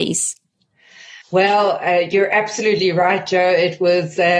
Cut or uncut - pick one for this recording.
cut